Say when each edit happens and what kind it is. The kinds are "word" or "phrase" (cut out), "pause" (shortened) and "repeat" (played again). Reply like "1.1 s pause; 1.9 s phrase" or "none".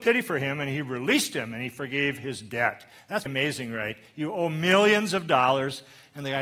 3.3 s word